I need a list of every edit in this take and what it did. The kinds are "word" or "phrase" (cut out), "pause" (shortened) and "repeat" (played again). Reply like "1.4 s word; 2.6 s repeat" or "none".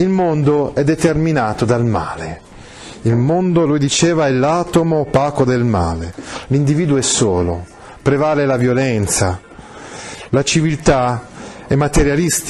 none